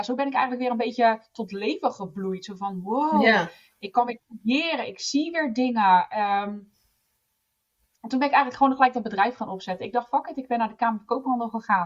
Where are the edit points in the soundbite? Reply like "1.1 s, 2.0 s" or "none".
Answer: none

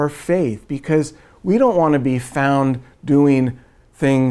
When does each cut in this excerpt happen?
none

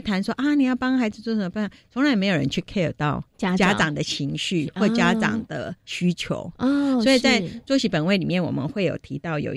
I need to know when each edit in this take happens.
3.3 s

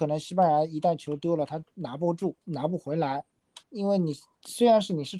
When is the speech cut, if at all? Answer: 2.4 s, 3.6 s

